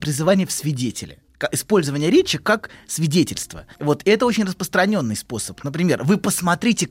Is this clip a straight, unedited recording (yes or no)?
no